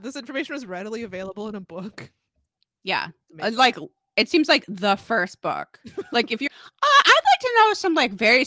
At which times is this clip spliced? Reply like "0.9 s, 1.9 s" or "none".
6.5 s